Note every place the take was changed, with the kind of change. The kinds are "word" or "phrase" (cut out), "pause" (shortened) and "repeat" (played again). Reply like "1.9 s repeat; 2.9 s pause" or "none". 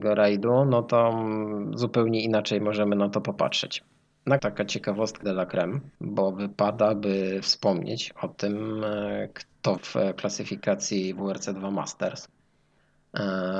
4.4 s phrase; 5.2 s word; 6.0 s pause; 9.8 s word